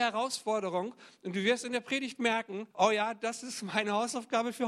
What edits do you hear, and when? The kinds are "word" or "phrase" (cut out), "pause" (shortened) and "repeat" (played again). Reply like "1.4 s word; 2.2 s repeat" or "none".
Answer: 2.7 s pause